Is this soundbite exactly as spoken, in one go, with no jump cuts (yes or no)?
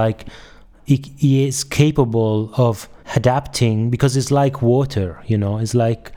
no